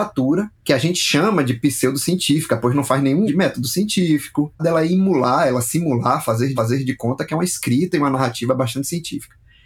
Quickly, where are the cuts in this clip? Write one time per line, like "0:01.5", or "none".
0:03.3
0:04.6
0:06.6